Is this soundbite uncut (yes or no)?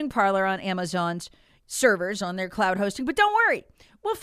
yes